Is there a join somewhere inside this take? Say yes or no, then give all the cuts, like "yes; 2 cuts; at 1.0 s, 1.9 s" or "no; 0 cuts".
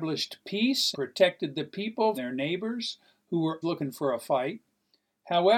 yes; 3 cuts; at 0.9 s, 2.1 s, 3.6 s